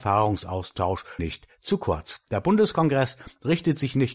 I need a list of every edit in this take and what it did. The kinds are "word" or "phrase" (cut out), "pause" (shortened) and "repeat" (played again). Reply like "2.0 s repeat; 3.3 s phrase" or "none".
1.2 s word